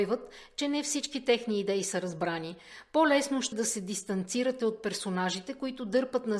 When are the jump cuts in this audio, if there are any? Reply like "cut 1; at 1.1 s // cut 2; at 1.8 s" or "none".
cut 1; at 3.5 s

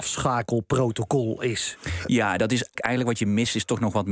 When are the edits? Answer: cut 1; at 2.7 s

